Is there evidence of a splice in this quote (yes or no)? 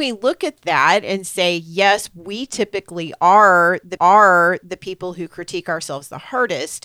yes